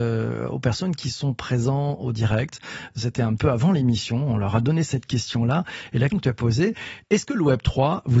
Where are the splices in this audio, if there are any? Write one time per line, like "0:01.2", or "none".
0:03.4
0:04.8
0:06.1

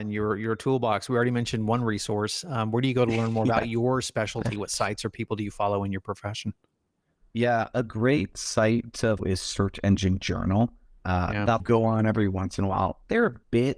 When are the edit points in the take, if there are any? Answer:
0:09.2
0:11.6

